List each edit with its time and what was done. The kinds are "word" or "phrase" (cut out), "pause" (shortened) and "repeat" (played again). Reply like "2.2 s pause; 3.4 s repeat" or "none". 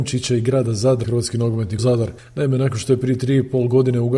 1.0 s word; 1.8 s word